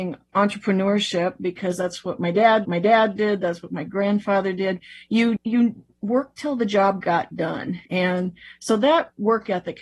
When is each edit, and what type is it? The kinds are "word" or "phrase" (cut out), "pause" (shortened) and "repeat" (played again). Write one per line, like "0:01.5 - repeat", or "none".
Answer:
0:02.7 - repeat
0:05.4 - word
0:07.9 - pause